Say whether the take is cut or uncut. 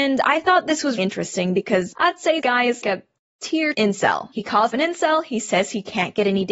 cut